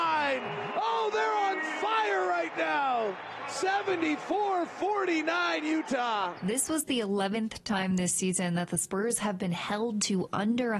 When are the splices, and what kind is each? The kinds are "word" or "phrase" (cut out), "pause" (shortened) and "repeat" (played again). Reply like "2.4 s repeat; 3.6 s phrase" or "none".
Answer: none

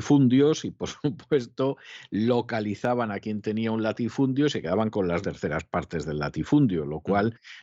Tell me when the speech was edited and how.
5.2 s word

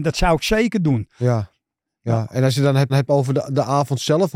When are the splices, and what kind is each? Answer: 2.9 s repeat

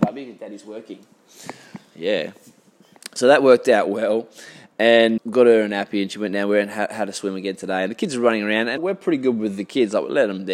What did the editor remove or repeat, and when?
5.2 s word; 8.8 s word

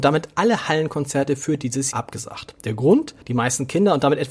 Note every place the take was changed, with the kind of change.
1.9 s word; 3.2 s pause

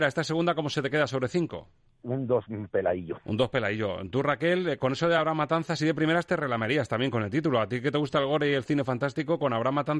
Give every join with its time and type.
none

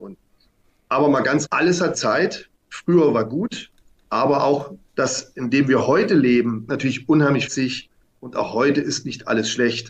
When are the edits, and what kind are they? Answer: 1.4 s phrase; 1.9 s word; 2.6 s pause; 3.9 s pause; 4.9 s pause; 6.7 s word; 7.5 s phrase

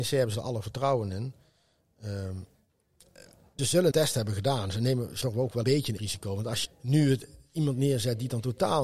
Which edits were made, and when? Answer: 3.6 s word; 3.9 s word; 5.2 s word; 5.6 s word; 6.0 s word; 6.6 s word

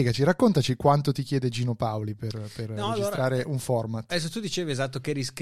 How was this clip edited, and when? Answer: none

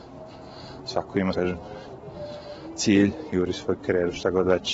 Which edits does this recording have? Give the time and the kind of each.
1.3 s word

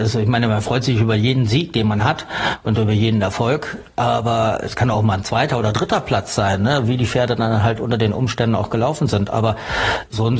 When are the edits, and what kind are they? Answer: none

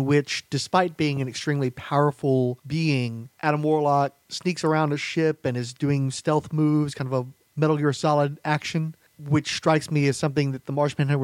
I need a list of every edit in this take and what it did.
none

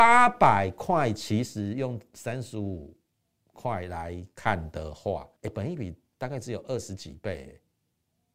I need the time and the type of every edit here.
5.4 s pause

